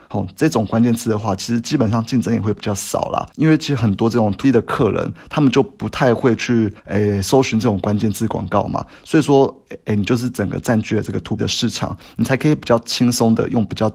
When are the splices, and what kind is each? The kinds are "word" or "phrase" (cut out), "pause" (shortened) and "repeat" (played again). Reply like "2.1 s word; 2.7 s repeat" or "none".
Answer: 3.3 s pause; 4.4 s word; 6.8 s pause; 11.4 s word